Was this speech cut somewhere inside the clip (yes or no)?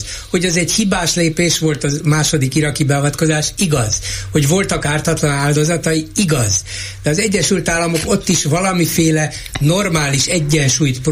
no